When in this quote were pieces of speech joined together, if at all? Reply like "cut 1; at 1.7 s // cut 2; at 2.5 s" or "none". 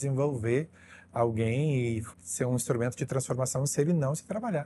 cut 1; at 2.1 s